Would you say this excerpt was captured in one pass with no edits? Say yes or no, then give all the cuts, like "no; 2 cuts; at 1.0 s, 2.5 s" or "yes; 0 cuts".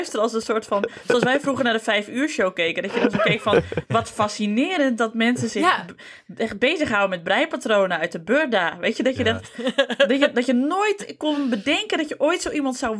yes; 0 cuts